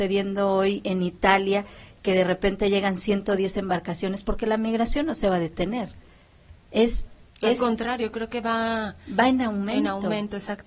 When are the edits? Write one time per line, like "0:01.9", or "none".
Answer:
0:06.6